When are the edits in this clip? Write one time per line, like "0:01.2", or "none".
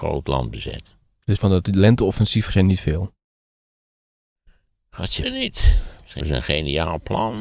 0:01.4
0:02.5
0:05.2
0:06.2